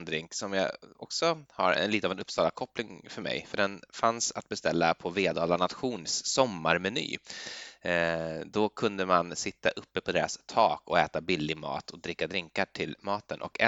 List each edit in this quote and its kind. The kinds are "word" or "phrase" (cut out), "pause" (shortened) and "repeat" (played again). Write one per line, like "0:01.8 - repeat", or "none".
none